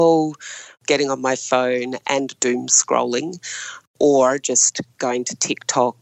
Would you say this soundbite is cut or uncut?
uncut